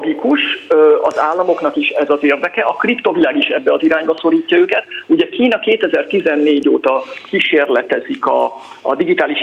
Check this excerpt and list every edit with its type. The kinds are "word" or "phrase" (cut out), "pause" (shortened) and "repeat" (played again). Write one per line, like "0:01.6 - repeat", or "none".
none